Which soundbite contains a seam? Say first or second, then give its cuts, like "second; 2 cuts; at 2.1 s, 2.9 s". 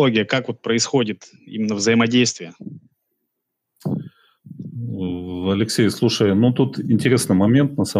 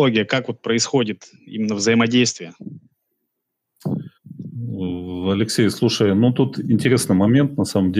second; 1 cut; at 4.2 s